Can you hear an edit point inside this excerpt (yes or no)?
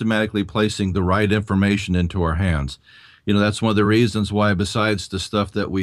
no